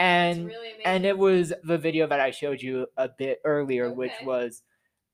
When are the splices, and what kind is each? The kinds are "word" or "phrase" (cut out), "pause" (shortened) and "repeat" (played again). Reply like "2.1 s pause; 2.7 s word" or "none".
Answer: 1.6 s word